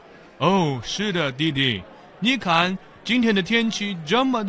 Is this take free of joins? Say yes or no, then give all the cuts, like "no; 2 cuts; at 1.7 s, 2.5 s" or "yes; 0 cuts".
yes; 0 cuts